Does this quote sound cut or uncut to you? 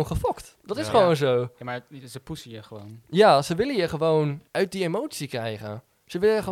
cut